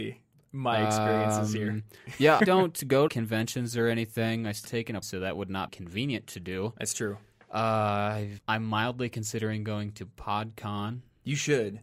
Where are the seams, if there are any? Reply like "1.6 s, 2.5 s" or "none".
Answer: 2.4 s, 3.1 s, 4.6 s, 5.0 s, 5.7 s, 8.4 s